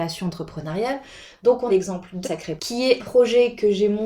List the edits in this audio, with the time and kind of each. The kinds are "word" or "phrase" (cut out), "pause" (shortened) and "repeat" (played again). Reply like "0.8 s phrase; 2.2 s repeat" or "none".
1.7 s word; 2.2 s word; 2.6 s word; 3.0 s word